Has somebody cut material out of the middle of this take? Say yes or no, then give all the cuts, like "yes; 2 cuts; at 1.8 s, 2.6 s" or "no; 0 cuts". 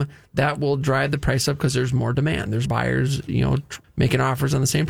yes; 2 cuts; at 2.7 s, 3.8 s